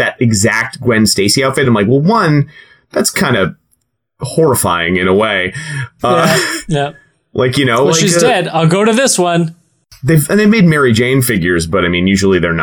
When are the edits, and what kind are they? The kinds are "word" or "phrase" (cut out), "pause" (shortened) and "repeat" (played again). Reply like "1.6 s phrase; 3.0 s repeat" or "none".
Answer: none

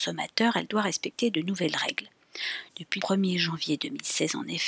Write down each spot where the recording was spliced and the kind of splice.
3.0 s word

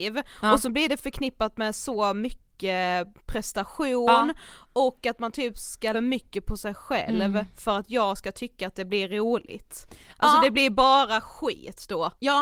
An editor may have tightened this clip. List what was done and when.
5.9 s phrase

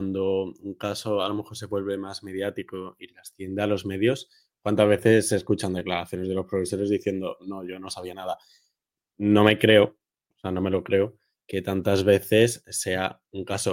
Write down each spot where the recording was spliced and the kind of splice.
none

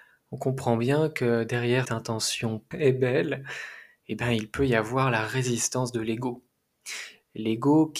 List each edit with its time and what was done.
1.8 s word; 2.7 s word

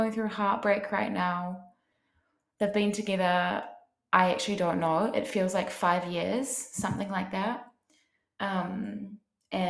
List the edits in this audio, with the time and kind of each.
none

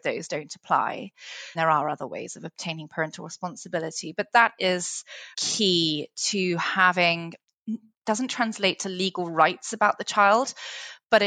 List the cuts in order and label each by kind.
1.6 s word; 5.3 s word; 7.9 s word

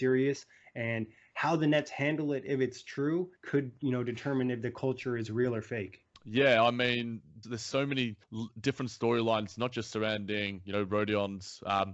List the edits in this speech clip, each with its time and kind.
3.4 s pause; 6.1 s pause; 7.4 s word; 8.2 s pause

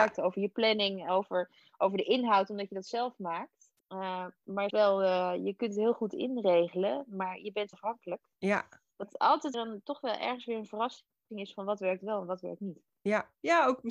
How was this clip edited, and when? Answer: 3.8 s pause; 4.7 s phrase; 7.7 s phrase; 9.5 s word

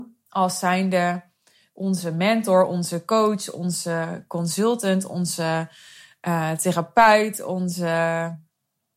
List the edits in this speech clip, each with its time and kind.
none

